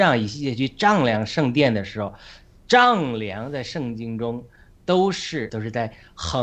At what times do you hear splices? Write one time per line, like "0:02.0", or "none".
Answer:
0:05.5